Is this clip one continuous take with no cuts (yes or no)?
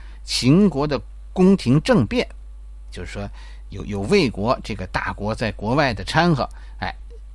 no